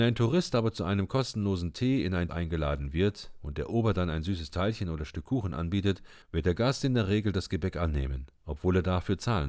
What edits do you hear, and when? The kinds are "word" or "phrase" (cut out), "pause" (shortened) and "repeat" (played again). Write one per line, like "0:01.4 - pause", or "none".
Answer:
0:02.3 - word
0:06.2 - pause